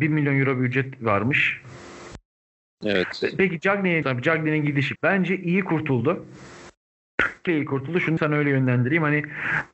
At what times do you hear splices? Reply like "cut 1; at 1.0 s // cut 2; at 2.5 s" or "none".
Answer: cut 1; at 4.0 s // cut 2; at 5.0 s // cut 3; at 7.5 s // cut 4; at 8.2 s

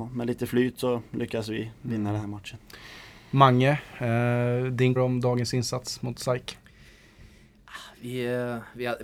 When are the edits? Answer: cut 1; at 5.0 s

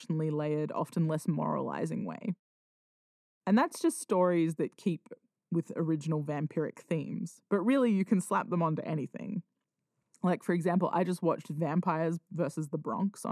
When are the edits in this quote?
none

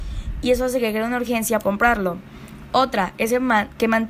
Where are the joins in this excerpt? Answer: cut 1; at 1.6 s

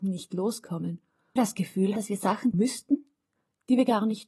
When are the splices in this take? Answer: cut 1; at 1.4 s // cut 2; at 2.0 s // cut 3; at 2.5 s

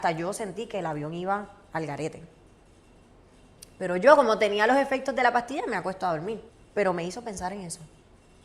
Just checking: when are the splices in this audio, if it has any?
cut 1; at 6.5 s

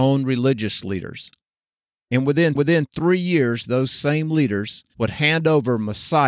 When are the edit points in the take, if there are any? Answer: cut 1; at 2.6 s // cut 2; at 4.9 s

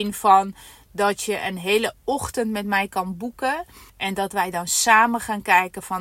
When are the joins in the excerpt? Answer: cut 1; at 3.9 s

